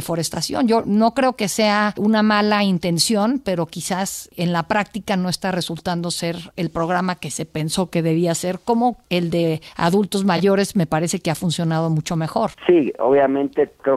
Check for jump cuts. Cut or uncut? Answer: cut